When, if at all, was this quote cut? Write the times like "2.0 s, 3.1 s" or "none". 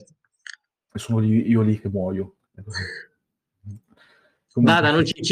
2.4 s